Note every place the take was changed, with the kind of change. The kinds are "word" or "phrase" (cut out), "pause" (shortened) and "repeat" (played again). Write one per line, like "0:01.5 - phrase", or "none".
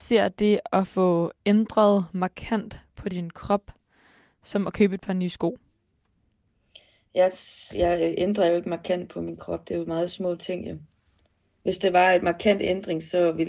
none